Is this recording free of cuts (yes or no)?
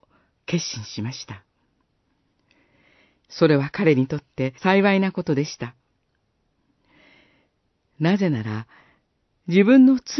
no